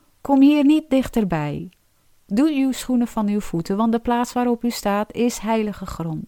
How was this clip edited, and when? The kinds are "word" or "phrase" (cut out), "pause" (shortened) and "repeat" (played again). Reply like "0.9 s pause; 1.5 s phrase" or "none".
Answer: none

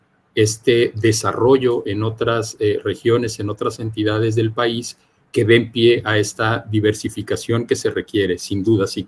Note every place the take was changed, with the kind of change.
none

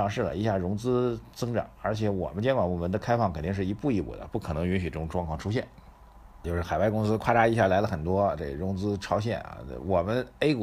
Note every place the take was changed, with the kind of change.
6.4 s word

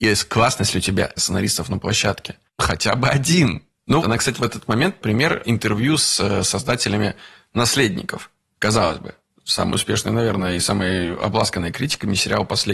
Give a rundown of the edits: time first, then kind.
1.2 s phrase; 2.5 s pause; 4.0 s word; 4.3 s word

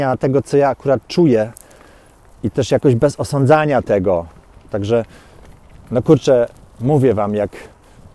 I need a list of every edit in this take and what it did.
none

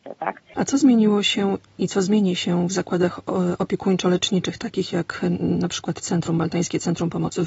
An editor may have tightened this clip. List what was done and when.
none

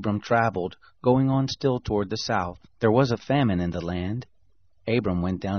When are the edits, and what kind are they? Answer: 2.7 s pause

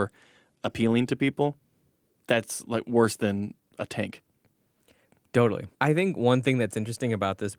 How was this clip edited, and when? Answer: 5.7 s pause

